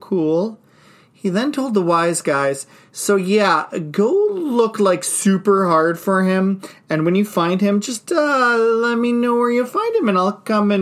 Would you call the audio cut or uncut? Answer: uncut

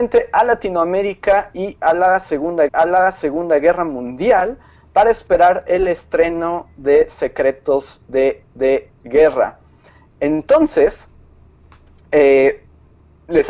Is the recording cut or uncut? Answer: cut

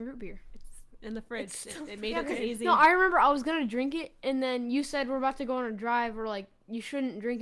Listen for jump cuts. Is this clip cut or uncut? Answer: uncut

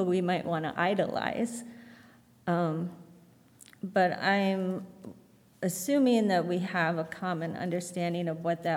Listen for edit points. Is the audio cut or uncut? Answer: uncut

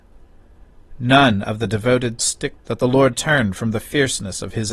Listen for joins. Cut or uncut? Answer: cut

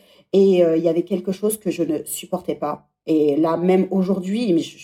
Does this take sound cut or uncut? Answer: uncut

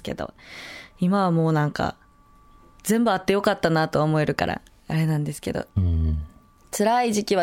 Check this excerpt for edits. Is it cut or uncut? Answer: uncut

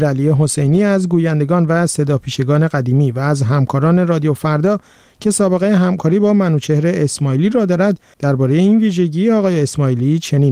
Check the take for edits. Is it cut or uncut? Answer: uncut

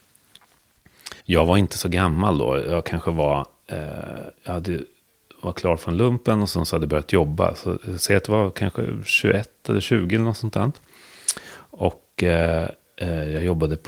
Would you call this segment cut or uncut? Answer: cut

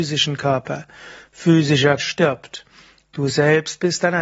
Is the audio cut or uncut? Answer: cut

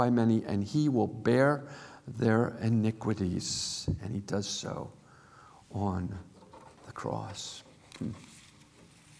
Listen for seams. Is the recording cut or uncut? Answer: uncut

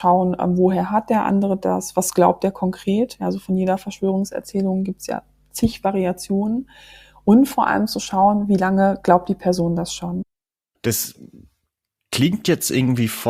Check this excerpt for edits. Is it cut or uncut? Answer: uncut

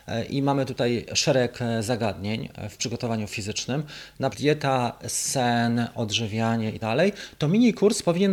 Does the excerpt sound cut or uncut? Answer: cut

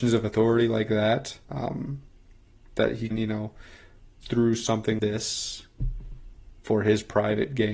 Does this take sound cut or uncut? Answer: cut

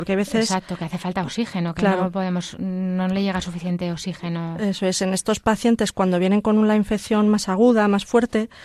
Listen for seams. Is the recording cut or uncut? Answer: uncut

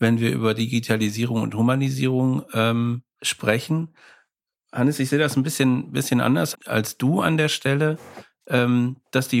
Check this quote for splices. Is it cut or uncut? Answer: cut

